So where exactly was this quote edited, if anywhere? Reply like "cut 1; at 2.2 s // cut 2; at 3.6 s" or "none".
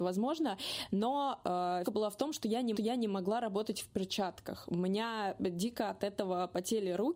cut 1; at 1.8 s // cut 2; at 2.7 s